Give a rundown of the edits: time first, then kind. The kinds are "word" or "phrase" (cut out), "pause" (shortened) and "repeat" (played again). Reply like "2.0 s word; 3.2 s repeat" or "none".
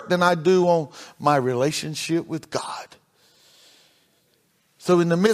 none